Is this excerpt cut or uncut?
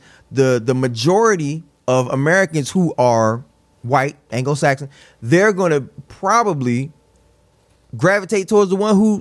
uncut